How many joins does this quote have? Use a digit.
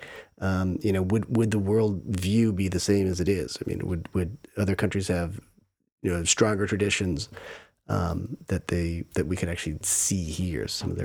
0